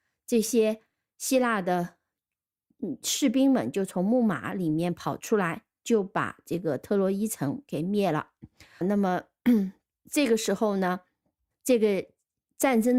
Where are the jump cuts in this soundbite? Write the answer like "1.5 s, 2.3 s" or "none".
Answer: 8.8 s, 11.5 s